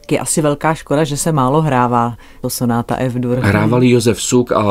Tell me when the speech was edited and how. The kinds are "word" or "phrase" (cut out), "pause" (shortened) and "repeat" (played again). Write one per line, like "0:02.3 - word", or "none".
0:02.4 - word